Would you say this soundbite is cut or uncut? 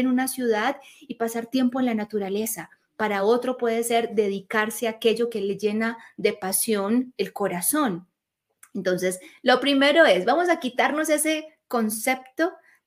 uncut